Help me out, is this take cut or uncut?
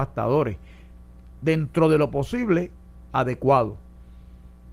uncut